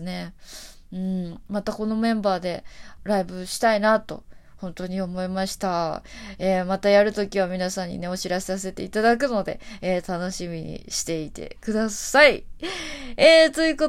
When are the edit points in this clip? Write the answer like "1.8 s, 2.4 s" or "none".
3.0 s